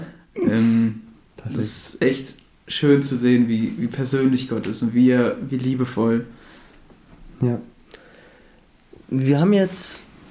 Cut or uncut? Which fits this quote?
cut